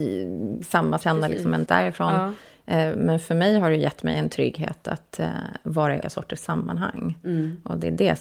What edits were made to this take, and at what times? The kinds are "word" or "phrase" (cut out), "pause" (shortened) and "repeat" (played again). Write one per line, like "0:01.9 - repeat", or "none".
0:01.0 - phrase
0:01.7 - word
0:06.0 - word